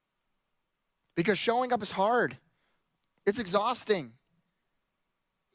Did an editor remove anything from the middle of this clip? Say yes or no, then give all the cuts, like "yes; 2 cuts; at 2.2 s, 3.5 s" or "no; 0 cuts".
no; 0 cuts